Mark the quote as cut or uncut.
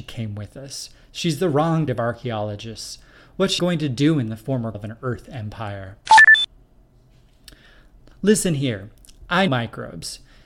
cut